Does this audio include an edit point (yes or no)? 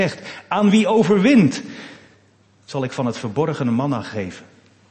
no